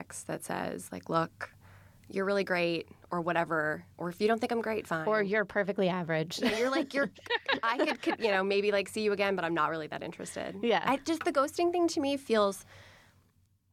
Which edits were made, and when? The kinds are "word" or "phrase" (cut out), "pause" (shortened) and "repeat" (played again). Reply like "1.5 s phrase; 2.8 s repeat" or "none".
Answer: none

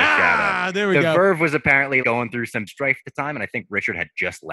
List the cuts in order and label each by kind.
2.0 s word; 2.7 s word

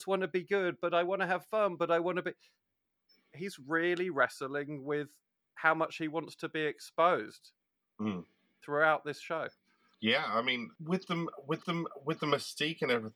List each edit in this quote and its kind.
11.6 s repeat

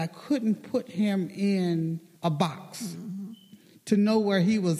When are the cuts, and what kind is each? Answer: 2.2 s pause

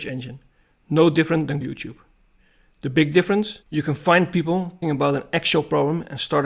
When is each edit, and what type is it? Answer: 1.6 s phrase; 3.6 s pause; 4.8 s word

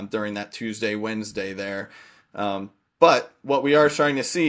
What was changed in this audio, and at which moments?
none

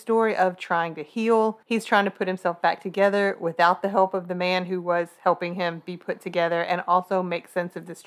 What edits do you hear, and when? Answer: 1.6 s pause

